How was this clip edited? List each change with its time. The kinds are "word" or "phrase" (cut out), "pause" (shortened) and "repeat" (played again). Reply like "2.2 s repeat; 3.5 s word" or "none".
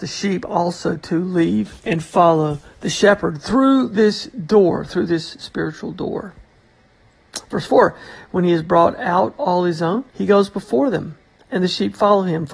1.8 s pause; 10.1 s pause; 11.4 s pause

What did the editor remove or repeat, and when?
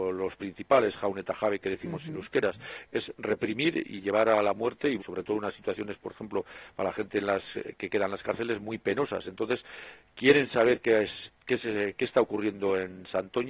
5.0 s word

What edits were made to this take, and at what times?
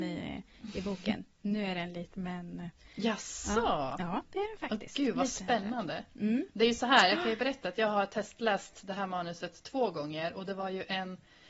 2.1 s word

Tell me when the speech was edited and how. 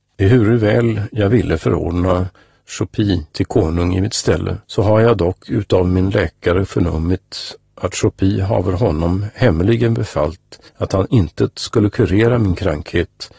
3.3 s pause; 4.6 s pause; 10.7 s pause

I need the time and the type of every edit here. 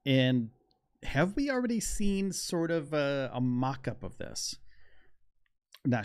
none

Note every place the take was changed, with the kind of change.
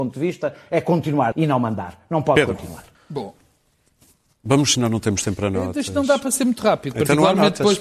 1.3 s phrase; 2.9 s pause; 4.7 s phrase

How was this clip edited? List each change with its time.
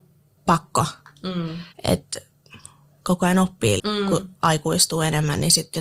1.7 s pause; 3.8 s word

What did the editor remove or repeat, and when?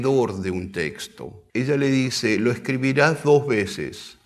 1.5 s pause

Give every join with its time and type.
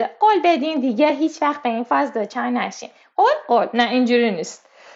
none

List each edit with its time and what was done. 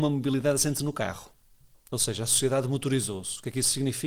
none

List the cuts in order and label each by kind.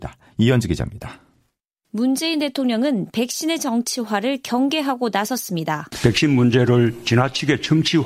none

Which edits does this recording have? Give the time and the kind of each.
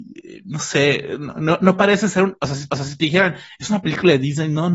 2.7 s repeat

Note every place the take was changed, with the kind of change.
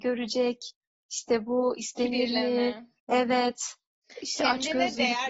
3.0 s pause

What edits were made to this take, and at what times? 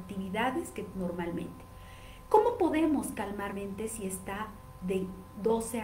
0.9 s word; 3.5 s word

